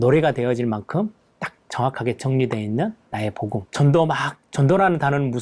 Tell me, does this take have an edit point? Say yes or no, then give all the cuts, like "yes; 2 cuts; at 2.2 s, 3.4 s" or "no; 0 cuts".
yes; 1 cut; at 3.7 s